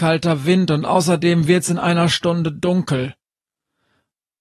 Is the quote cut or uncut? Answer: uncut